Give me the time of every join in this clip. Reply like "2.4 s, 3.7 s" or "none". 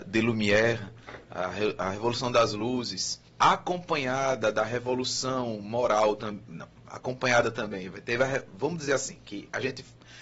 3.3 s